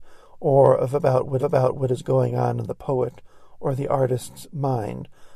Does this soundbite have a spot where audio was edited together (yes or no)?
yes